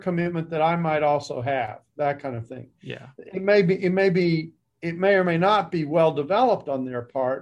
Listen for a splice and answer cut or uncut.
uncut